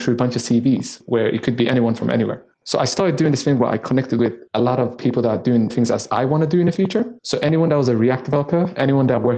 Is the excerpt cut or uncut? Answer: cut